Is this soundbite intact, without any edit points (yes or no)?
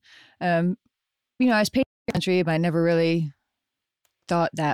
yes